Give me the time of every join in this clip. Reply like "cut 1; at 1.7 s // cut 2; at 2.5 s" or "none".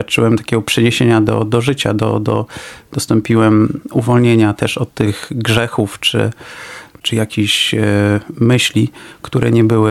none